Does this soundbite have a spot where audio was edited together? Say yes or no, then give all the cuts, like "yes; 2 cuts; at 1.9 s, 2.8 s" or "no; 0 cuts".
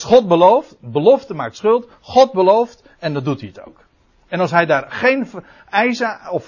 no; 0 cuts